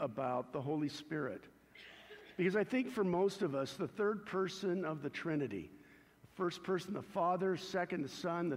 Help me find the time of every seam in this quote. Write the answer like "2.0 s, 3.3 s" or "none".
none